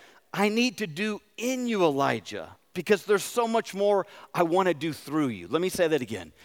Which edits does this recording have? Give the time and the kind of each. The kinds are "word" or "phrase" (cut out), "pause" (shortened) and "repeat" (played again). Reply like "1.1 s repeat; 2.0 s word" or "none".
none

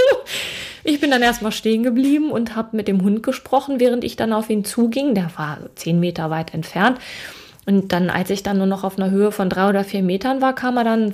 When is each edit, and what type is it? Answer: none

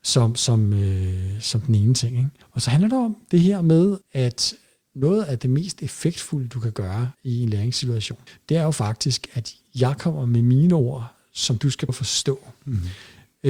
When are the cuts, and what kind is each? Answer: 2.4 s pause; 4.0 s pause; 7.1 s pause; 8.3 s pause; 11.9 s word

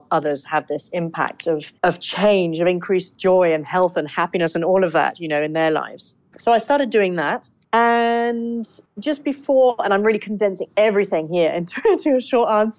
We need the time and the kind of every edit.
1.8 s pause

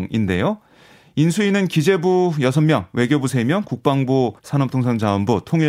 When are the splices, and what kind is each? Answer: 4.4 s phrase

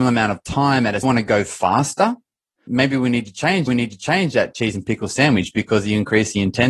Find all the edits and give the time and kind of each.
1.0 s phrase; 2.7 s word; 3.7 s repeat

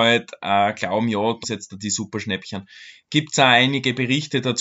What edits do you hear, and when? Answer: 1.4 s word

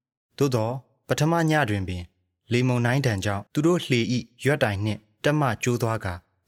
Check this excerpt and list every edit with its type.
3.5 s pause

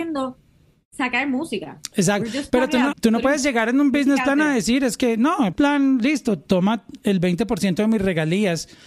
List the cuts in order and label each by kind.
2.9 s word; 5.5 s word

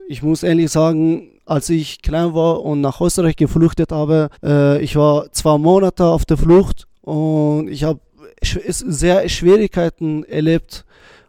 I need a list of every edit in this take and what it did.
1.4 s pause; 4.3 s pause

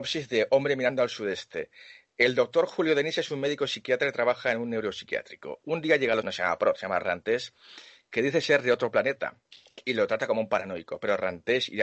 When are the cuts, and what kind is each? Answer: 6.2 s phrase

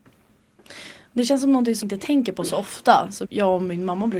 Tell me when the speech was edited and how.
1.8 s word; 3.2 s word

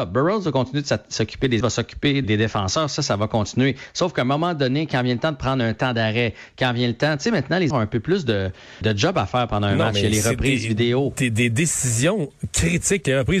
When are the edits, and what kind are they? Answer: 1.6 s phrase; 2.2 s word; 7.7 s word; 8.8 s word

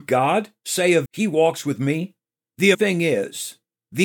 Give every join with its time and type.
1.1 s word; 2.7 s word

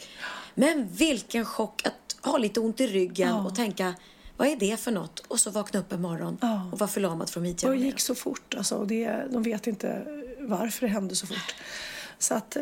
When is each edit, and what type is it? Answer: none

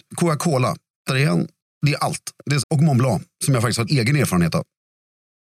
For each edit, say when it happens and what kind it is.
1.1 s word; 2.6 s word; 3.9 s word

